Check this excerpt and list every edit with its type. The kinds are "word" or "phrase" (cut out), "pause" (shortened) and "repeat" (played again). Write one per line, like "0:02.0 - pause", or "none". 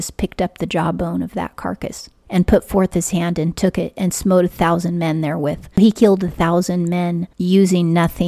none